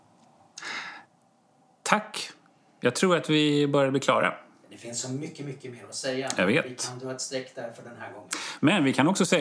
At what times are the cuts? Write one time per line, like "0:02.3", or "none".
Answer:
none